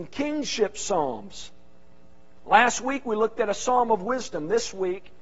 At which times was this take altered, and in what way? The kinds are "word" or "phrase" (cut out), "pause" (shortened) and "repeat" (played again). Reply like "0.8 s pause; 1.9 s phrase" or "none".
none